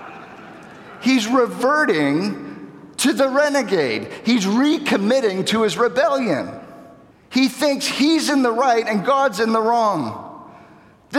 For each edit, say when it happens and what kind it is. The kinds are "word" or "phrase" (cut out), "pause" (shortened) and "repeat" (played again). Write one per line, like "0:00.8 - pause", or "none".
0:07.1 - pause